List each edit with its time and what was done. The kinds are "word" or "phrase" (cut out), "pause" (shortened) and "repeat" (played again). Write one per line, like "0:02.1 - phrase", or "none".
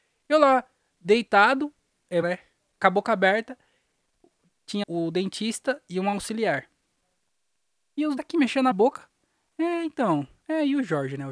0:02.2 - word
0:04.8 - word
0:08.2 - word
0:08.7 - word

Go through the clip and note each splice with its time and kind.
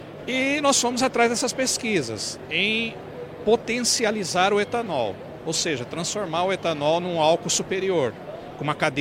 none

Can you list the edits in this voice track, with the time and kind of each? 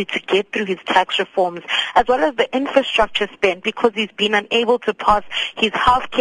none

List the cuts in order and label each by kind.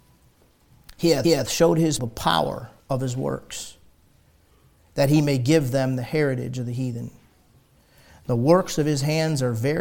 0:01.2 - repeat
0:02.0 - word
0:02.8 - pause

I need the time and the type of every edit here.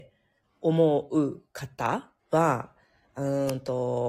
0:02.2 - pause

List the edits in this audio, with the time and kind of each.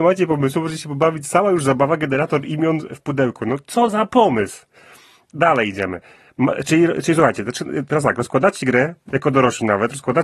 none

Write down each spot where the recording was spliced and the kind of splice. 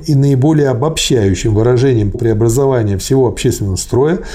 0:02.1 - word

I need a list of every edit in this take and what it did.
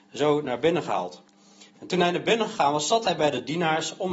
0:01.7 - pause

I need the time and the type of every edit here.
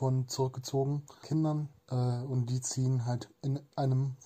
0:01.2 - phrase
0:01.8 - pause

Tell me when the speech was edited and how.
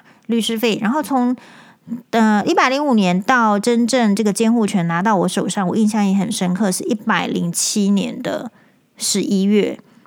none

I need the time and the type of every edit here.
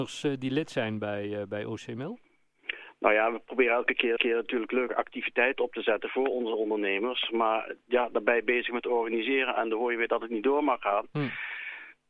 0:04.2 - repeat

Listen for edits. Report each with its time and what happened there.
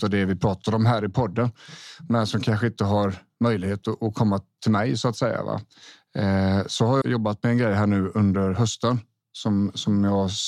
0:07.0 - word

